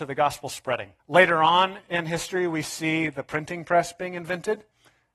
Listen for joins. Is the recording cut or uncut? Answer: cut